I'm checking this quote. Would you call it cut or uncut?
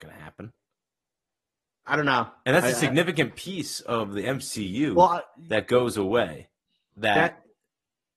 uncut